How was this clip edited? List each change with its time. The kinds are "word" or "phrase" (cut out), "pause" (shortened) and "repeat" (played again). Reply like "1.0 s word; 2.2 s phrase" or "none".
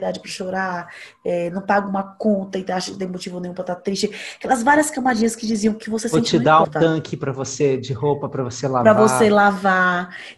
6.6 s word